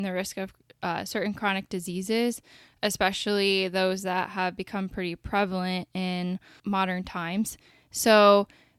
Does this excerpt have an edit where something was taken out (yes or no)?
no